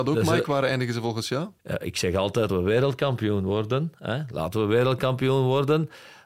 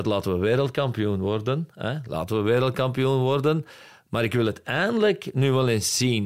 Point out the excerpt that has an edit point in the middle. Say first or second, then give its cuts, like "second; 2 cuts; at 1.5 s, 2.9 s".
first; 2 cuts; at 1.6 s, 2.5 s